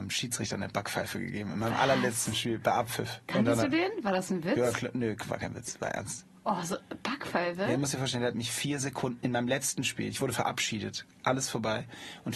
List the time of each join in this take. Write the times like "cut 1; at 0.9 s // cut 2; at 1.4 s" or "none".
cut 1; at 3.2 s

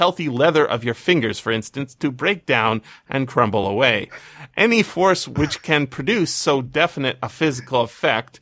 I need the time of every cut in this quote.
none

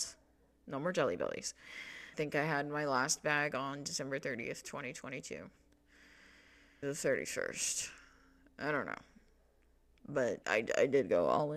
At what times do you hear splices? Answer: cut 1; at 2.1 s // cut 2; at 6.8 s // cut 3; at 10.4 s

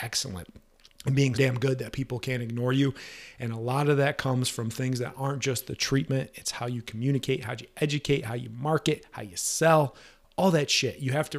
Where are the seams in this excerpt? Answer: cut 1; at 1.3 s

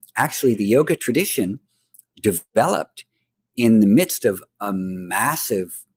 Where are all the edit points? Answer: cut 1; at 2.1 s

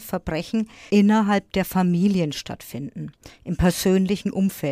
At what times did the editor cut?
cut 1; at 0.9 s

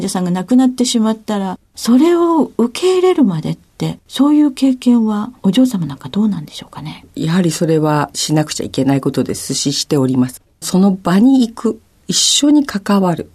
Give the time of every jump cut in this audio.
cut 1; at 1.7 s // cut 2; at 4.0 s // cut 3; at 5.4 s

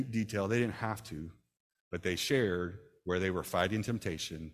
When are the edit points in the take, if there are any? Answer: none

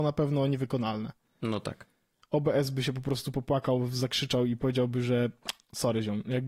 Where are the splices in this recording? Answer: none

